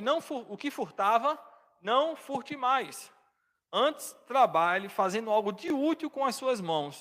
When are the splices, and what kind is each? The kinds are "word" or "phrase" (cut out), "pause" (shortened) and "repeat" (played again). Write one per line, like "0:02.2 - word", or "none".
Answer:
none